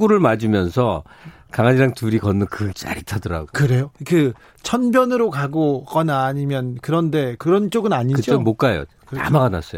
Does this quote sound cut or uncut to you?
cut